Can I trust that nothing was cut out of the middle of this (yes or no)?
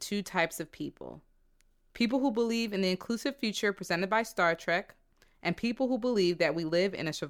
yes